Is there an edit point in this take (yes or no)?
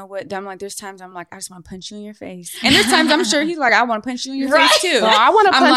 no